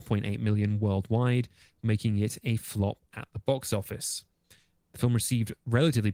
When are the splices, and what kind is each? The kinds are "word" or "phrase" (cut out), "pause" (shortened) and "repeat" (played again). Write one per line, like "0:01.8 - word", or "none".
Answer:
none